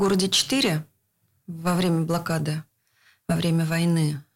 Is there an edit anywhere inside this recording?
no; 0 cuts

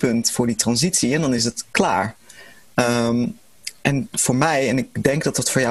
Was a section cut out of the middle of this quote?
no; 0 cuts

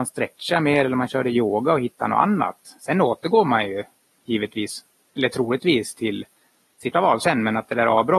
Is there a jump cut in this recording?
yes; 1 cut; at 6.9 s

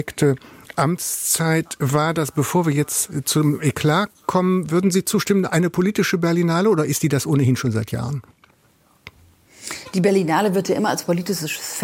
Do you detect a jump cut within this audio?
no; 0 cuts

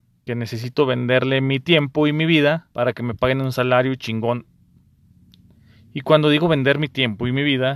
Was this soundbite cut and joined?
yes; 1 cut; at 2.7 s

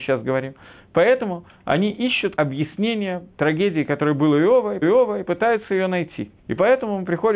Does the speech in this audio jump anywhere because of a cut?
yes; 4 cuts; at 2.4 s, 3.3 s, 4.8 s, 6.4 s

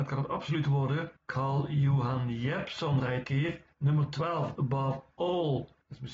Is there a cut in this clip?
yes; 4 cuts; at 1.2 s, 3.2 s, 3.7 s, 4.6 s

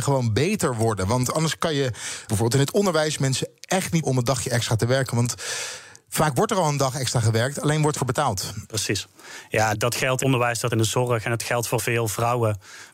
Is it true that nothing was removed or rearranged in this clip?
no; 7 cuts; at 2.3 s, 4.0 s, 8.0 s, 9.7 s, 10.2 s, 10.7 s, 11.8 s

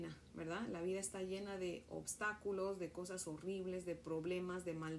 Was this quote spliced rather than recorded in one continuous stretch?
no; 0 cuts

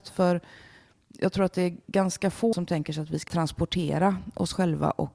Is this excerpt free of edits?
no; 3 cuts; at 1.8 s, 2.5 s, 3.3 s

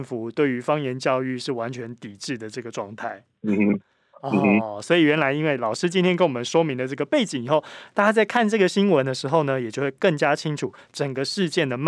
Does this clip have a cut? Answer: no; 0 cuts

